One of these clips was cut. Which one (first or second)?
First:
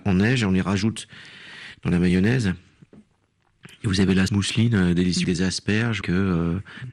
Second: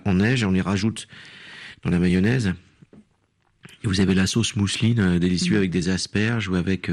first